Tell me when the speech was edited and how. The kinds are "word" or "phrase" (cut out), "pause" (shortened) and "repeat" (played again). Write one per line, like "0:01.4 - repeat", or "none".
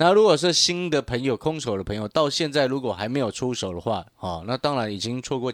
0:04.1 - pause